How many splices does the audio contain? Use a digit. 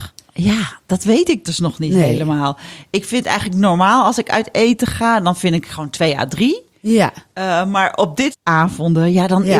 1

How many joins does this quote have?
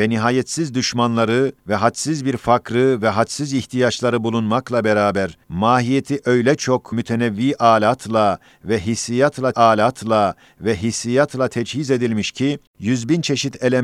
5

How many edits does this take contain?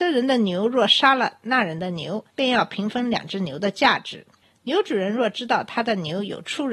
1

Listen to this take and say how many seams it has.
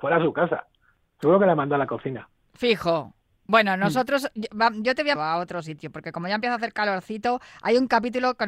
1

